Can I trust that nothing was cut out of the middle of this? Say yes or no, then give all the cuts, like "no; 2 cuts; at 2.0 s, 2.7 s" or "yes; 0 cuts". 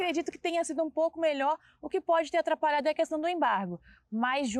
yes; 0 cuts